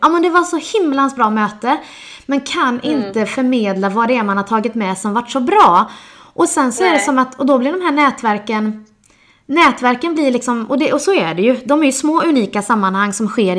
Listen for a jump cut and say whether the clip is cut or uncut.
uncut